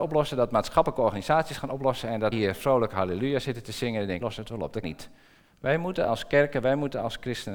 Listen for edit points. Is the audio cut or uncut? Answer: cut